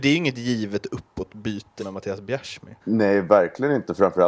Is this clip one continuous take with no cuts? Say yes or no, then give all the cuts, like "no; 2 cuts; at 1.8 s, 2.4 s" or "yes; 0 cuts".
no; 2 cuts; at 1.8 s, 2.8 s